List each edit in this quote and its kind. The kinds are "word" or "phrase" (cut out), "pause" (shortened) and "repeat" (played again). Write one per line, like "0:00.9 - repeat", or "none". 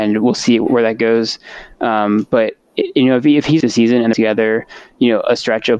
0:03.6 - phrase
0:04.1 - phrase

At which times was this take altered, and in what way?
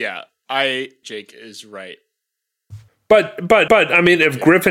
0:01.0 - phrase
0:02.9 - pause
0:03.7 - repeat

